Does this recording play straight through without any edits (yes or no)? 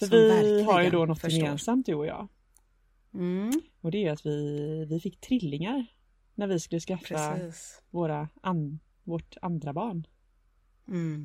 yes